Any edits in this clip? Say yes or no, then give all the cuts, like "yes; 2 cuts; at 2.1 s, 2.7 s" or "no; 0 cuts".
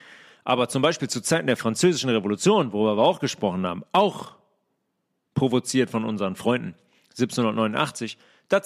no; 0 cuts